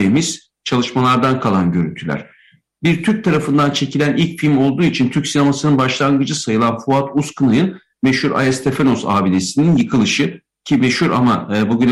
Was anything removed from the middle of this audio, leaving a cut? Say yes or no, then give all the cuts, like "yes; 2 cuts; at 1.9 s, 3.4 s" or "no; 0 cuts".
no; 0 cuts